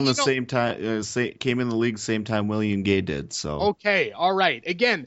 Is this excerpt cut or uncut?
uncut